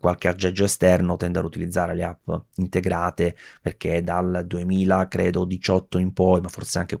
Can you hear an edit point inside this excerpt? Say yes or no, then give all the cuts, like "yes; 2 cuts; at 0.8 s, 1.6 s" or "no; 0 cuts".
no; 0 cuts